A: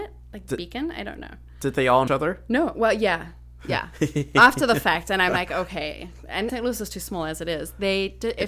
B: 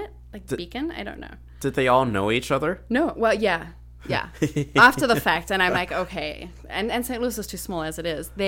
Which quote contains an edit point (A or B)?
A